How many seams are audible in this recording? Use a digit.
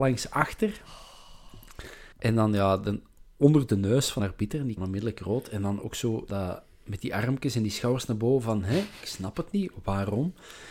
4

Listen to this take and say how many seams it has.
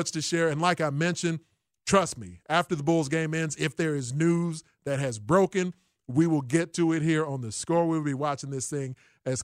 0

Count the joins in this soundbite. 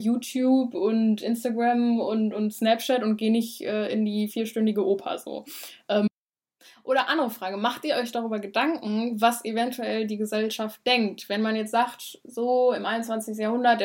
0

